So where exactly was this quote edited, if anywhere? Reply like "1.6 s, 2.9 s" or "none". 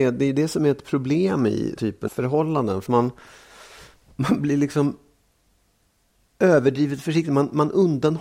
1.8 s, 2.1 s, 2.9 s

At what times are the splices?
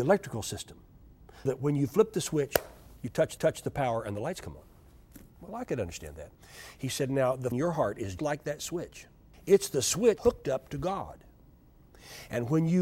1.5 s, 3.4 s, 5.3 s, 7.5 s, 8.2 s, 9.3 s, 10.2 s

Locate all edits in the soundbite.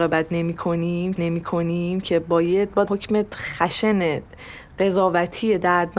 1.2 s, 2.9 s

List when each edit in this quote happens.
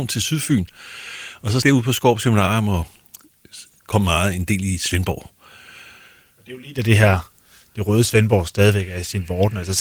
1.6 s

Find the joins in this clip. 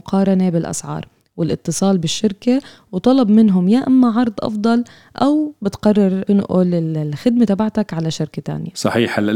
none

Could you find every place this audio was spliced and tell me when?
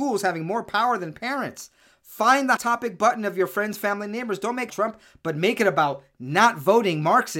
2.6 s, 4.7 s

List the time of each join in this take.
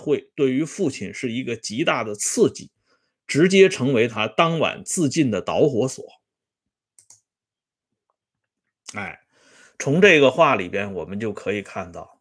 none

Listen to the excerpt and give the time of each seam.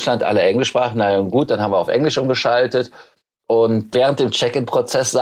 3.9 s

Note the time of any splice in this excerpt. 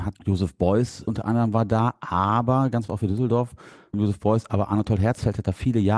2.9 s

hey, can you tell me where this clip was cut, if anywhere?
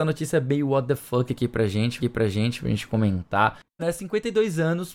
2.0 s, 3.8 s

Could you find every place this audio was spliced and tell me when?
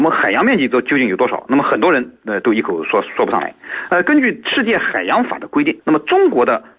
5.8 s

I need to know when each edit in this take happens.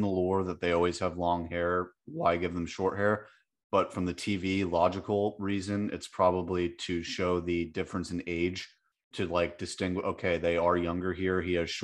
9.1 s

